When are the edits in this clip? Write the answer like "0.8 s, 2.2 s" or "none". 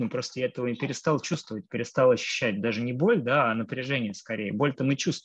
none